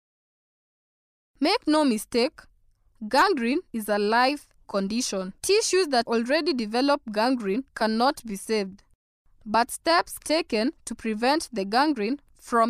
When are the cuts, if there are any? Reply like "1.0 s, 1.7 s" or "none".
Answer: 3.7 s, 4.6 s, 5.4 s, 6.0 s, 7.7 s, 9.2 s, 10.2 s, 10.8 s